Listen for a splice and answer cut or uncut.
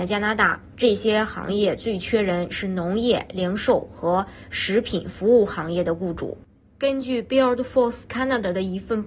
uncut